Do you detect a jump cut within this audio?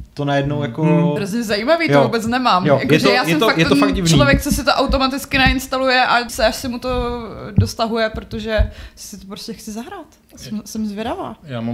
yes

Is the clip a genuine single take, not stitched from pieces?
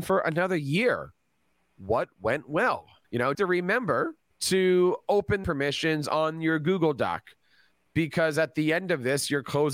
no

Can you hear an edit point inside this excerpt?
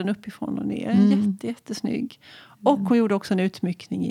no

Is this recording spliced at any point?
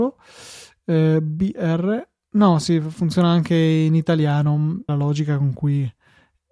yes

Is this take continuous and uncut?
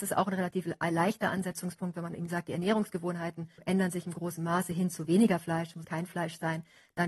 no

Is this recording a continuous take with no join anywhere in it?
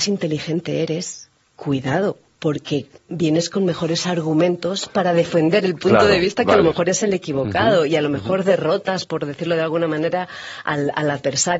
yes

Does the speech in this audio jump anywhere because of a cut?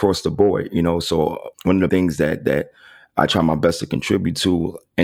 yes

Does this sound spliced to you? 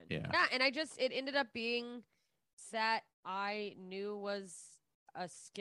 yes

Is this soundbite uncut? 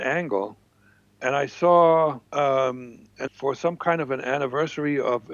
no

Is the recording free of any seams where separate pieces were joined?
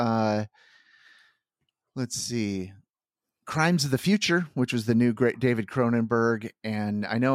yes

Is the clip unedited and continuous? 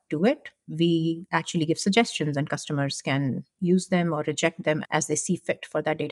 yes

